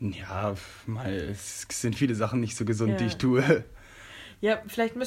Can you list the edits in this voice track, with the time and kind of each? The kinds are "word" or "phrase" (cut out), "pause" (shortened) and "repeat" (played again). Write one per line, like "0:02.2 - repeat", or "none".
none

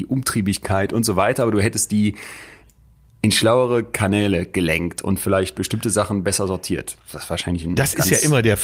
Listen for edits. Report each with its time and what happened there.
none

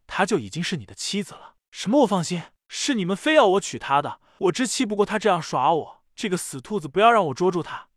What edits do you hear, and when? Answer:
none

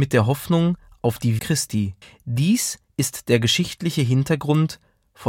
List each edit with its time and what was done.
0:01.4 - word
0:02.0 - pause

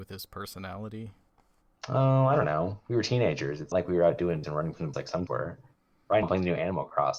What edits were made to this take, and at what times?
0:03.7 - word
0:04.4 - word
0:04.9 - word
0:05.3 - word
0:06.2 - word

